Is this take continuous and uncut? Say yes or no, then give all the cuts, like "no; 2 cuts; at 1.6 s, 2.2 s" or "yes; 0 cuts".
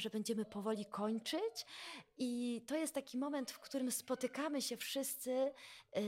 yes; 0 cuts